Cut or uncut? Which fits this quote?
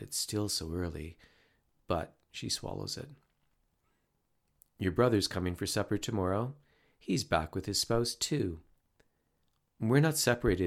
uncut